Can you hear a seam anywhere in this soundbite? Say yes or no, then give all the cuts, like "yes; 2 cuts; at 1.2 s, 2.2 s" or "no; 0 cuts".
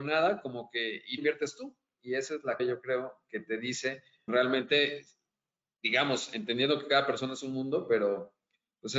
yes; 3 cuts; at 1.2 s, 2.6 s, 4.3 s